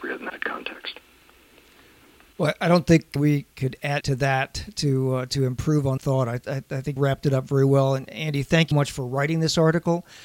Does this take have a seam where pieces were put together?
yes; 5 cuts; at 3.2 s, 4.0 s, 6.0 s, 7.0 s, 8.7 s

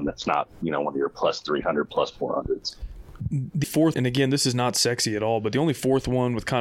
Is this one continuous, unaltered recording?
no; 2 cuts; at 3.6 s, 3.9 s

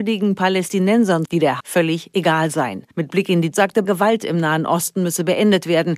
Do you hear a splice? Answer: yes; 5 cuts; at 1.3 s, 1.6 s, 2.9 s, 3.5 s, 3.8 s

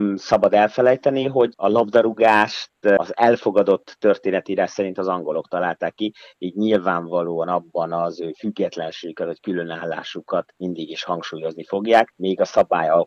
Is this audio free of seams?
yes; 0 cuts

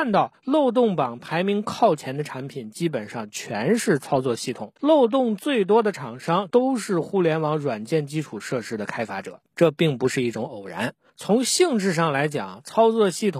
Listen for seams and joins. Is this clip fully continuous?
no; 2 cuts; at 4.8 s, 9.5 s

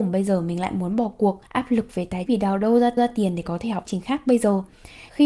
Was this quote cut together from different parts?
yes; 4 cuts; at 1.5 s, 2.3 s, 3.0 s, 3.9 s

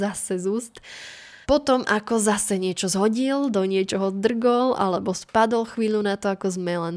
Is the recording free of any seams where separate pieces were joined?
no; 1 cut; at 1.4 s

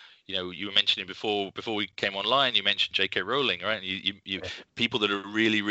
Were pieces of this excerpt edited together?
no; 0 cuts

